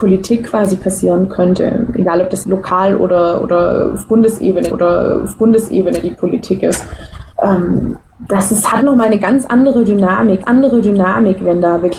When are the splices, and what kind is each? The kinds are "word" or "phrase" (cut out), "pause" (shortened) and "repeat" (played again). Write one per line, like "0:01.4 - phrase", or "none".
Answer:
0:02.4 - word
0:04.7 - repeat
0:07.3 - pause
0:10.4 - repeat